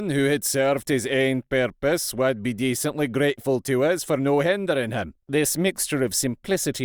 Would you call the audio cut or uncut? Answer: cut